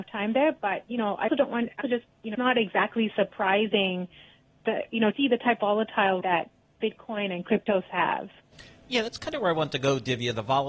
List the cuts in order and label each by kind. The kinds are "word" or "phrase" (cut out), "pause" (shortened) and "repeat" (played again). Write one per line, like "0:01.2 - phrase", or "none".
0:01.3 - word
0:01.8 - word
0:02.3 - word
0:05.1 - word
0:05.6 - word
0:06.2 - word
0:07.9 - word